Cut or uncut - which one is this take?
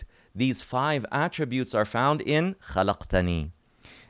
uncut